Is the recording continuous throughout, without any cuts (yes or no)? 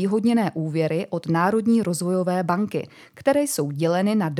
yes